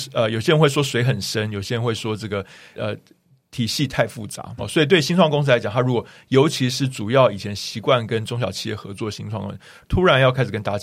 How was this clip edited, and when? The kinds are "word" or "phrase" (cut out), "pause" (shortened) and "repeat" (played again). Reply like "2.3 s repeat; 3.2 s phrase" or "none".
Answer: 2.7 s word; 4.6 s word